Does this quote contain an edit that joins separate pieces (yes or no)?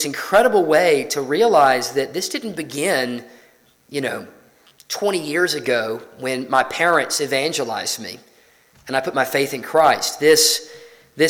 no